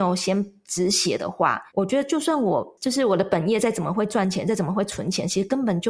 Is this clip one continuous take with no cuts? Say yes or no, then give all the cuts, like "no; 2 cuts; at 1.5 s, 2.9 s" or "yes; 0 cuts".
no; 1 cut; at 1.7 s